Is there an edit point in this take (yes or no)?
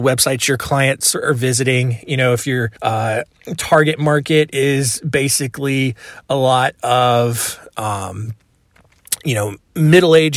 yes